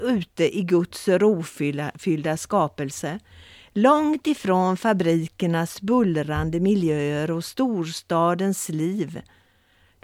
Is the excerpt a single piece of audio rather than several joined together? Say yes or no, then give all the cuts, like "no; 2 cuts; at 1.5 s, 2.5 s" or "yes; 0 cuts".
yes; 0 cuts